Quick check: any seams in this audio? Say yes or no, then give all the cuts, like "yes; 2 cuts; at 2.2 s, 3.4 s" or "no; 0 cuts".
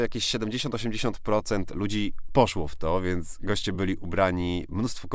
no; 0 cuts